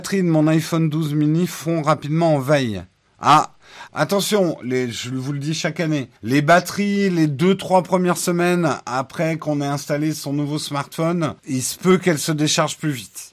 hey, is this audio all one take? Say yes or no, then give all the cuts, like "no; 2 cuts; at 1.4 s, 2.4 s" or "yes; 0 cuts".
no; 3 cuts; at 3.9 s, 6.2 s, 11.4 s